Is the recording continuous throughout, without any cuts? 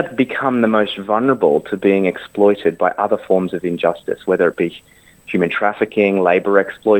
yes; 0 cuts

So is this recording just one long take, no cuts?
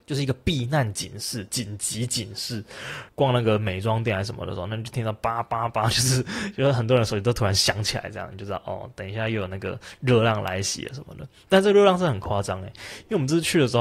yes; 0 cuts

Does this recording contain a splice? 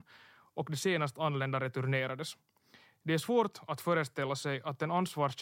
no; 0 cuts

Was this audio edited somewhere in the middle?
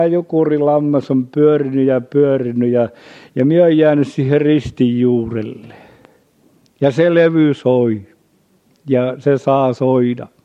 no; 0 cuts

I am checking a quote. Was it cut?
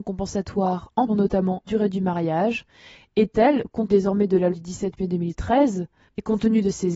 yes; 4 cuts; at 1.1 s, 1.7 s, 3.9 s, 4.5 s

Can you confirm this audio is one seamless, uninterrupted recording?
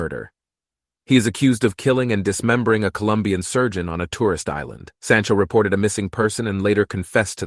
no; 1 cut; at 4.9 s

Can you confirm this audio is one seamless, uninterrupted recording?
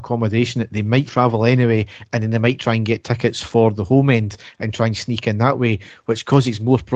no; 1 cut; at 1.1 s

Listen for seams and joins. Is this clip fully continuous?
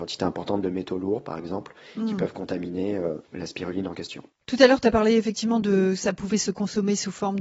yes; 0 cuts

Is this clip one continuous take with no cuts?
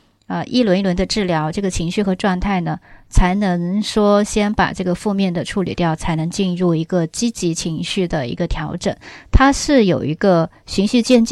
yes; 0 cuts

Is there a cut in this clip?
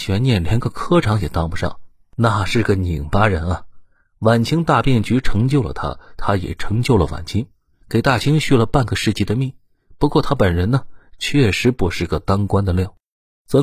no; 0 cuts

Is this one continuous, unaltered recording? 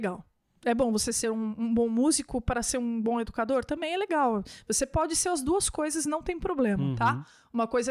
yes; 0 cuts

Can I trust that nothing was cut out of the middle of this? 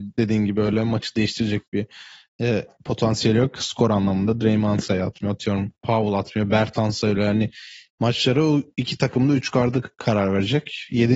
yes; 0 cuts

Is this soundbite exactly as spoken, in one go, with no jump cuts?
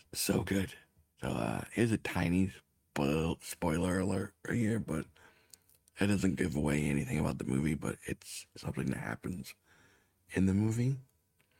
yes; 0 cuts

